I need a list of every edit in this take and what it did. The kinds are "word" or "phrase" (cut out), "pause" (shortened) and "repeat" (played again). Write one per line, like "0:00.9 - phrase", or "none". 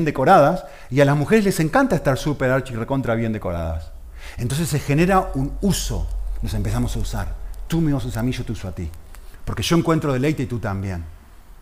none